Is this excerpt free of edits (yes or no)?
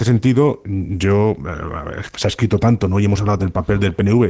no